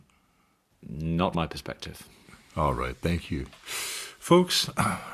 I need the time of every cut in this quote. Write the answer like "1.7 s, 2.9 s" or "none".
1.3 s